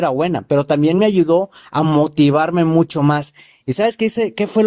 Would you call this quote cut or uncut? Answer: uncut